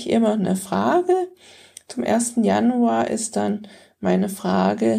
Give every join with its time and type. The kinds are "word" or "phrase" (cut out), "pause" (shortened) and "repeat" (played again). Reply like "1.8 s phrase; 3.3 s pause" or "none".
none